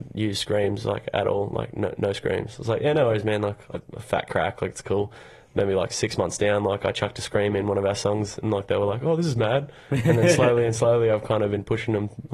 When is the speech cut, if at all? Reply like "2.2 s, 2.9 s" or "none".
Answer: 3.7 s